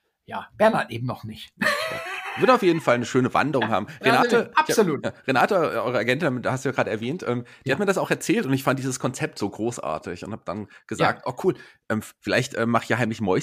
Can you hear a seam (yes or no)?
no